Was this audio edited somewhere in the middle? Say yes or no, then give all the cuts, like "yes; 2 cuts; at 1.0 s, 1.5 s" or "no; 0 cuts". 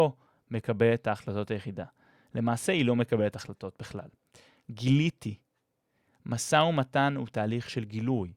no; 0 cuts